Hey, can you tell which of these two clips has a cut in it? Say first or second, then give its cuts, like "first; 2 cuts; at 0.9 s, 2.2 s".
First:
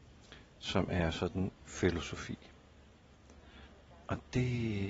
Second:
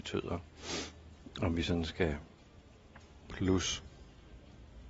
first; 1 cut; at 1.6 s